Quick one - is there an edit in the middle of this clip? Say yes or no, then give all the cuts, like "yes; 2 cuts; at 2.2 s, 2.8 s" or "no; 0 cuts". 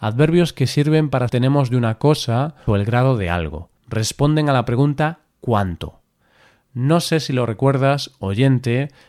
yes; 3 cuts; at 1.3 s, 2.7 s, 3.8 s